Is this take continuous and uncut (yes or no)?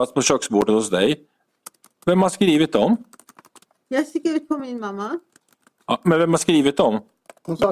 yes